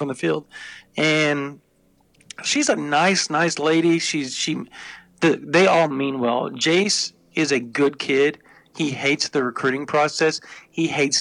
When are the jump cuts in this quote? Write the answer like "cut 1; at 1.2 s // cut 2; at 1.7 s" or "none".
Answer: none